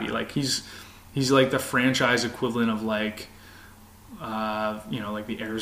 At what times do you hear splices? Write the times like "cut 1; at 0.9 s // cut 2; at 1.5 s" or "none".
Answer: none